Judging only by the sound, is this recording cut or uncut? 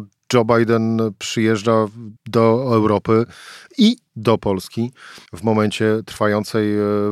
cut